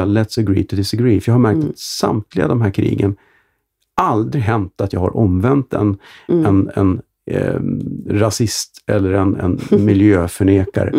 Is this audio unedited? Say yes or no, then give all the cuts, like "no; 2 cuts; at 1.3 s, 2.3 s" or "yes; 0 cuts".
yes; 0 cuts